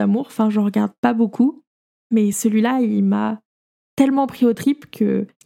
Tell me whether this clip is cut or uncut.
uncut